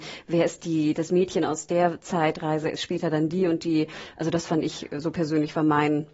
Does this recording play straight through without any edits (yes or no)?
yes